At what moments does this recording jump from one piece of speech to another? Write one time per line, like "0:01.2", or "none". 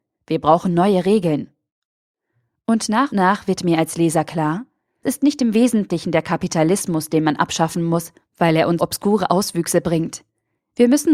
0:03.1
0:05.0
0:08.8